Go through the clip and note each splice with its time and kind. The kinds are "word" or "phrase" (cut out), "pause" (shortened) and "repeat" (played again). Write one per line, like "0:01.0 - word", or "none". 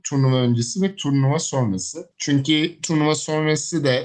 0:02.1 - pause